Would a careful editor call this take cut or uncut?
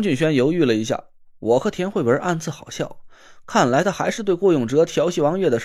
uncut